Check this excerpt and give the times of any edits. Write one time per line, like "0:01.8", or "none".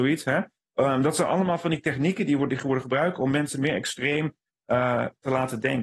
none